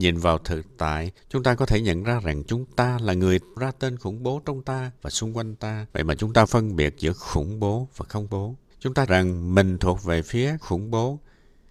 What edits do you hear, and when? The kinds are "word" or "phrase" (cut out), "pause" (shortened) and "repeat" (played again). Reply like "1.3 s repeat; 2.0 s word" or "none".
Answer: 1.2 s pause; 3.6 s word; 5.0 s pause; 5.9 s pause; 6.5 s word; 8.3 s word; 8.7 s pause; 9.1 s word; 10.6 s word

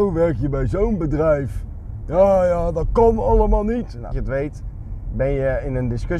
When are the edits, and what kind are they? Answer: 4.1 s word

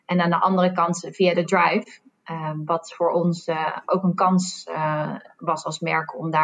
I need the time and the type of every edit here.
none

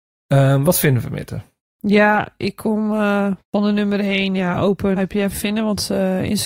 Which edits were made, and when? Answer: 1.6 s pause; 3.4 s pause; 5.0 s word; 5.3 s phrase

